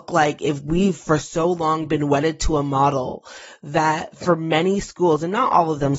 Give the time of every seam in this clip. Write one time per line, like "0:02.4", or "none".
none

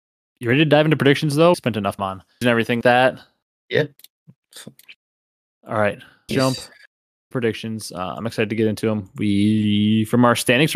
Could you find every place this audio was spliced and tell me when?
0:01.5
0:02.0
0:02.4
0:02.8
0:06.3
0:07.3

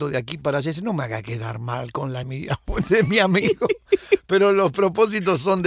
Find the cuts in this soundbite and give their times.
0:02.2

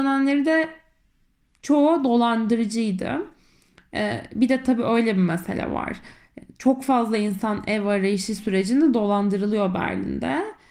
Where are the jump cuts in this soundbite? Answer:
none

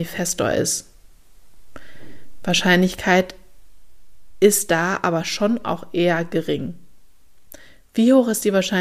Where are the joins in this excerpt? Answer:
none

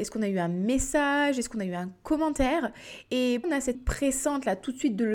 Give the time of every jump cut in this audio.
0:03.4
0:03.7

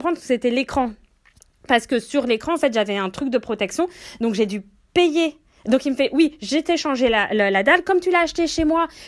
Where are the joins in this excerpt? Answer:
none

